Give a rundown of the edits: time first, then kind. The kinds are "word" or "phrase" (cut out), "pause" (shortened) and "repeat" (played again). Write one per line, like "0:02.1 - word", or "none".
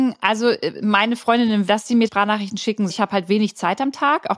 0:01.7 - word
0:02.1 - word
0:02.9 - phrase